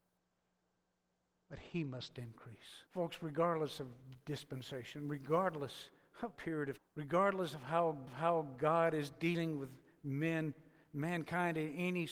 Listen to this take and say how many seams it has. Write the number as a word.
four